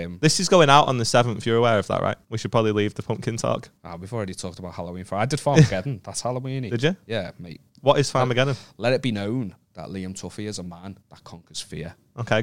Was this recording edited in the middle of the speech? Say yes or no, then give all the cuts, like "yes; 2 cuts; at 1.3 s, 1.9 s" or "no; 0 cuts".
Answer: yes; 5 cuts; at 2.2 s, 3.8 s, 7.7 s, 9.6 s, 11.0 s